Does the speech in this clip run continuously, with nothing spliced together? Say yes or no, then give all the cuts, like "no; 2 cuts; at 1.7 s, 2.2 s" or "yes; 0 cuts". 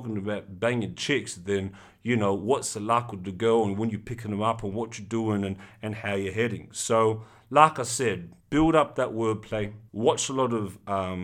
no; 2 cuts; at 8.4 s, 9.9 s